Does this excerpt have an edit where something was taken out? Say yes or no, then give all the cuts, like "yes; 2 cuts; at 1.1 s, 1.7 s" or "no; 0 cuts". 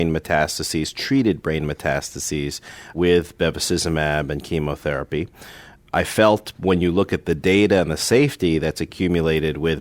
no; 0 cuts